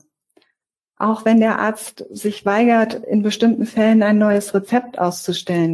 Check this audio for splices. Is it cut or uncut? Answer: uncut